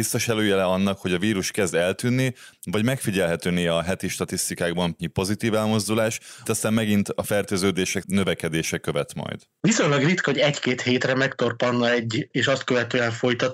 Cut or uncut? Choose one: cut